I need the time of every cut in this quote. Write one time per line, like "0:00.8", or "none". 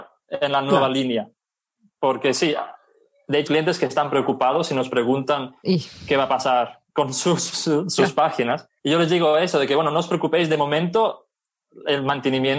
0:03.5
0:06.9
0:08.8